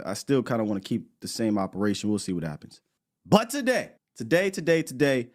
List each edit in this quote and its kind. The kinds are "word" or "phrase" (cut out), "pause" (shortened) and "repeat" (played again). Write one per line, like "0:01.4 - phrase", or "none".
0:03.0 - pause
0:04.0 - pause